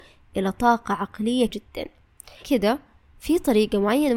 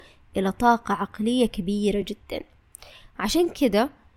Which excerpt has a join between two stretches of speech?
first; 2 cuts; at 1.5 s, 2.4 s

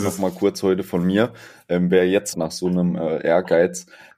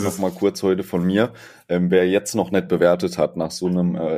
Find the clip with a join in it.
first; 1 cut; at 2.3 s

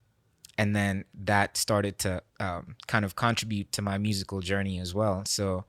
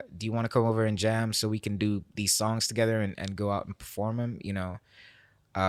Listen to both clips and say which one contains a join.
first; 1 cut; at 2.3 s

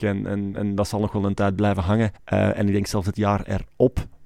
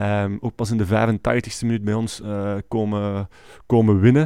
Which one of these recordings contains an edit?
first; 1 cut; at 2.2 s

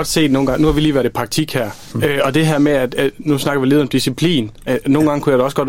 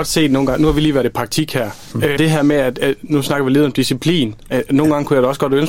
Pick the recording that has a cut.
second; 1 cut; at 2.2 s

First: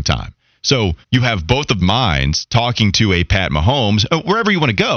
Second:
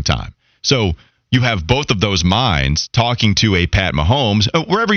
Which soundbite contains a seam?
first; 2 cuts; at 1.0 s, 1.8 s

